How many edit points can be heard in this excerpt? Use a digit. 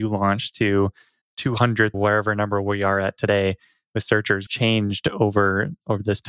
3